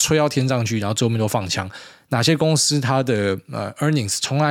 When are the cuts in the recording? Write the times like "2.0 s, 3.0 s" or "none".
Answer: none